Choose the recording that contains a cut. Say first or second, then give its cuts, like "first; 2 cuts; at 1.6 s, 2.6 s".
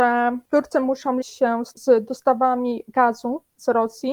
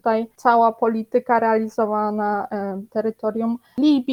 first; 2 cuts; at 1.2 s, 1.7 s